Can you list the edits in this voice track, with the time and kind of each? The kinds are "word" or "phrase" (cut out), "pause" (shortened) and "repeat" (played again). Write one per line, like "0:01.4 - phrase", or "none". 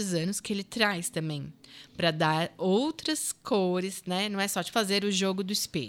0:04.7 - word